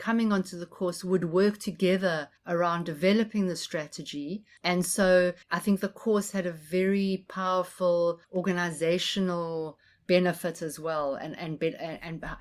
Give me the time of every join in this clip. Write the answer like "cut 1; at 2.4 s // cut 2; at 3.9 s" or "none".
cut 1; at 2.4 s // cut 2; at 5.4 s // cut 3; at 8.2 s